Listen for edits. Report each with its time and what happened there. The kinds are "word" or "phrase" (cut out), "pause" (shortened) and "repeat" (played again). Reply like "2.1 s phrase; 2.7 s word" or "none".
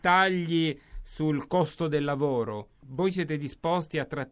none